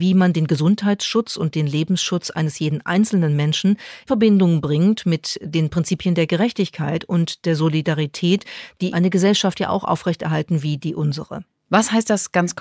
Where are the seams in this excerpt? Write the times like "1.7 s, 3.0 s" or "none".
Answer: 4.1 s, 8.9 s